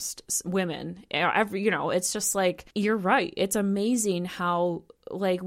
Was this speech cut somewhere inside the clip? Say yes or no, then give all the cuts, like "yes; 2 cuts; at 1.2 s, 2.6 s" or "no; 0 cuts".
yes; 1 cut; at 2.7 s